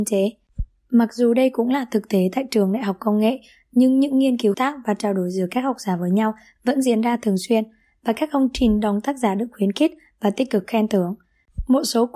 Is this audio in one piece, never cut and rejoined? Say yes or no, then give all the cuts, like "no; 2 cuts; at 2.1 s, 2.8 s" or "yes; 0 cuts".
no; 1 cut; at 4.5 s